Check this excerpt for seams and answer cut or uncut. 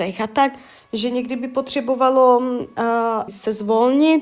cut